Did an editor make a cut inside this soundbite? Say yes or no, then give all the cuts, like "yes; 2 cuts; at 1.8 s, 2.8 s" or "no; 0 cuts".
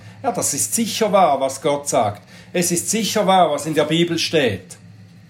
no; 0 cuts